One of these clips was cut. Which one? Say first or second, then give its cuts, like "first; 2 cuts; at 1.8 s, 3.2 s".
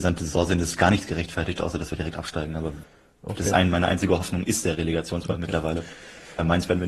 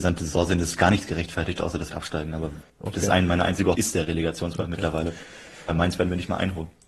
second; 3 cuts; at 1.9 s, 2.7 s, 3.8 s